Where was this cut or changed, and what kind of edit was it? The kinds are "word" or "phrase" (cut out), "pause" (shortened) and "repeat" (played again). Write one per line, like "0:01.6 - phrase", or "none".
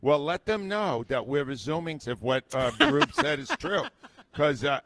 0:02.0 - word